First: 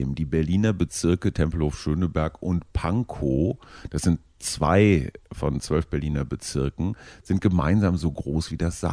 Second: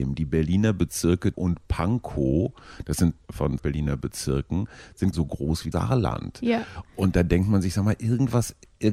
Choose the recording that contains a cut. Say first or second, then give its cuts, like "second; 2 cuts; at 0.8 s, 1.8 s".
second; 5 cuts; at 1.3 s, 3.2 s, 3.6 s, 5.1 s, 5.7 s